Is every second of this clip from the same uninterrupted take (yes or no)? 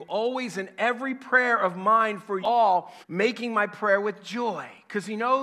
no